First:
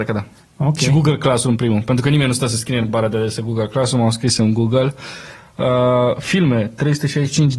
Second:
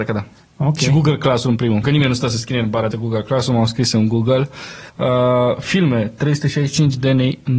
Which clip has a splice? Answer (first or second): second